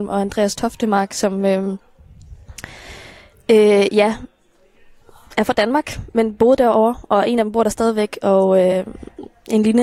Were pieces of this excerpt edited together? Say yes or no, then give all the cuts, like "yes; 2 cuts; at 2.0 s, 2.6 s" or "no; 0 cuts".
no; 0 cuts